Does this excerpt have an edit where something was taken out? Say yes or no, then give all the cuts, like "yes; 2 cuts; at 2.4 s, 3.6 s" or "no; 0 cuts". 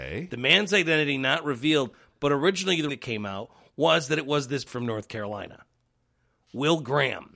yes; 2 cuts; at 2.9 s, 4.7 s